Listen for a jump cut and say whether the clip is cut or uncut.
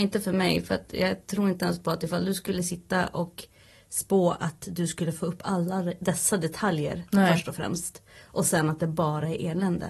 uncut